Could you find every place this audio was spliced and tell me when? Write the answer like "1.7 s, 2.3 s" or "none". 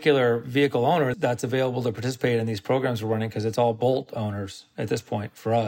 1.1 s